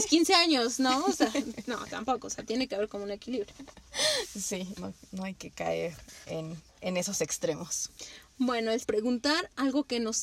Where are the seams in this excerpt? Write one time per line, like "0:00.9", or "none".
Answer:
0:04.8
0:06.7
0:08.8

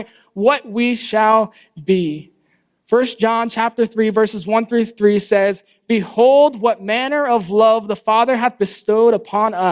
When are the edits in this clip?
none

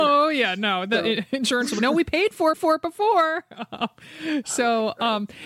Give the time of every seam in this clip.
0:01.8
0:02.5

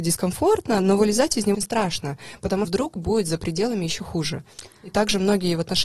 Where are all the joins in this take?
0:01.5
0:02.6

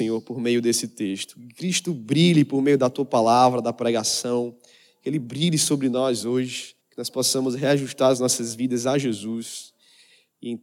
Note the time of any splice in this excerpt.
0:06.8

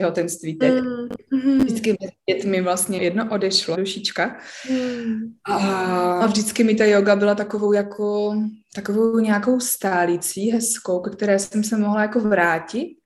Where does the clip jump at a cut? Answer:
0:03.0
0:03.7
0:06.2

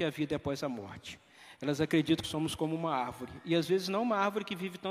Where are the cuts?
0:02.2

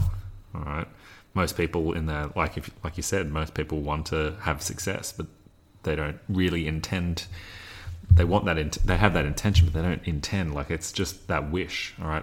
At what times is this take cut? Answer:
0:05.5

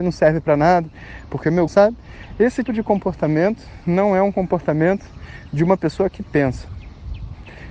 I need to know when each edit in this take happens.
0:01.7
0:02.6

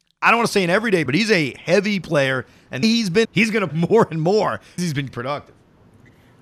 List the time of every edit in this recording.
0:01.1
0:02.0
0:02.8
0:03.2
0:03.7
0:04.8
0:05.1

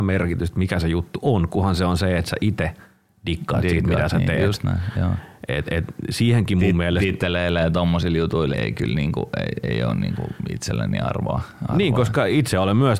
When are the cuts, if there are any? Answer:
0:08.5

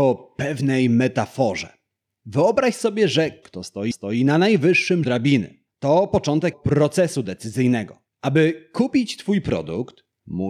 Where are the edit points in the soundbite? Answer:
0:03.4
0:03.9
0:05.0
0:06.5

